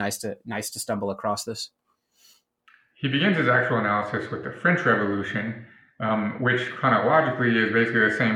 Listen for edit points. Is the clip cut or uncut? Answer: uncut